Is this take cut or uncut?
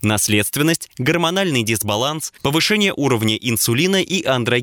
uncut